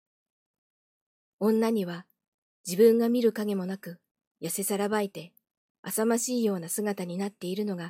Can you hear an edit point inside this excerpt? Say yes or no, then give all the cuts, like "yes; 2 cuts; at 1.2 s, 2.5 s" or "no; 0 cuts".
no; 0 cuts